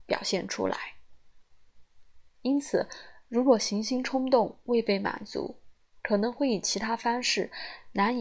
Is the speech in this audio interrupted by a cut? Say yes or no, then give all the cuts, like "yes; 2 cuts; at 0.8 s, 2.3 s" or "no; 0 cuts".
no; 0 cuts